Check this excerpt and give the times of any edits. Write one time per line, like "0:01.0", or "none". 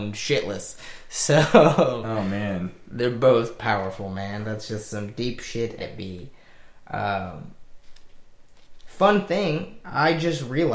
0:05.8

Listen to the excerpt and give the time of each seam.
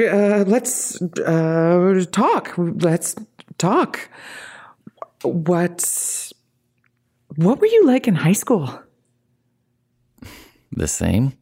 none

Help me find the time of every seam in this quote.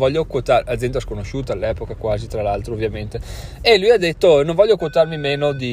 none

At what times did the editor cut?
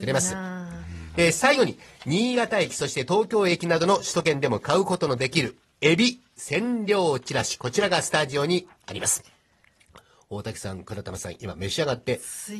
none

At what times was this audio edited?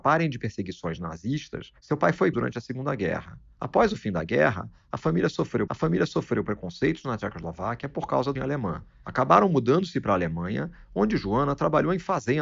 0:01.8
0:02.3
0:05.7
0:08.4

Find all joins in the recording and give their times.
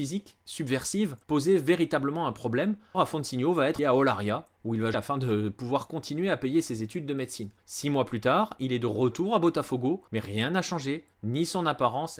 0:01.2
0:02.9
0:03.8
0:04.9
0:07.6
0:10.1
0:11.1

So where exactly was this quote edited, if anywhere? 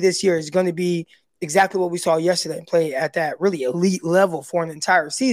none

